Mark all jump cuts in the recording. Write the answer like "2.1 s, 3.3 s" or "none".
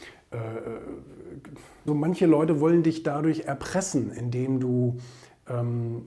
1.9 s